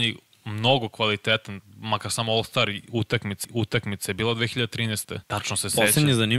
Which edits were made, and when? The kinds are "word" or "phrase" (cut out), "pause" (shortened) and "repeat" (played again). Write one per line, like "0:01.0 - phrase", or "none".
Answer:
0:03.4 - repeat
0:05.2 - pause